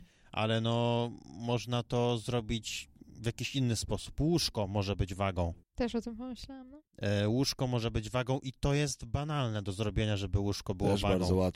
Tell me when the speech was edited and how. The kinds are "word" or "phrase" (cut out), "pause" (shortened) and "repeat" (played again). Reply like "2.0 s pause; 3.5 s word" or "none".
5.6 s pause; 6.9 s pause